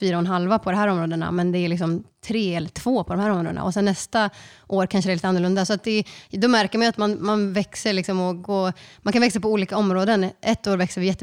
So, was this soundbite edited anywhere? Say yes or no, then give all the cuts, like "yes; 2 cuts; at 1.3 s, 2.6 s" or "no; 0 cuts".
no; 0 cuts